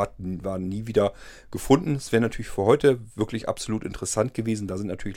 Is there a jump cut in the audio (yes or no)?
no